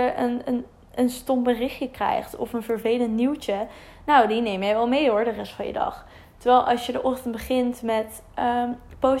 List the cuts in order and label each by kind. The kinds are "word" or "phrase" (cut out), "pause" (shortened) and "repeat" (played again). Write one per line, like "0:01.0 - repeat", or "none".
none